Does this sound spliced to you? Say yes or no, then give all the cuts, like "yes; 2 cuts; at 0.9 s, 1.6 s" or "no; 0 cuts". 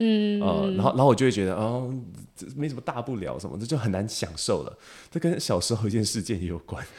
no; 0 cuts